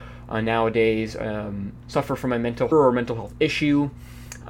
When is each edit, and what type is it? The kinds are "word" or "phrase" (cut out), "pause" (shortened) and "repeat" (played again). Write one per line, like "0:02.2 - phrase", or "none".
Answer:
0:01.9 - word
0:02.7 - phrase